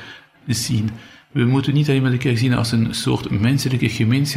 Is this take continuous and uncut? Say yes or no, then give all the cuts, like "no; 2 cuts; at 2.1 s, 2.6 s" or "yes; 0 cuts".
yes; 0 cuts